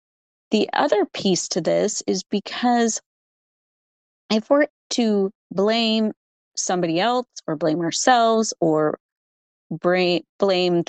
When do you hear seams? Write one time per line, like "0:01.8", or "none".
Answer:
0:04.7
0:06.5